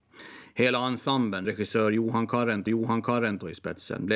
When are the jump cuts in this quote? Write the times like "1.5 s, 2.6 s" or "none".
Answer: 1.4 s, 2.7 s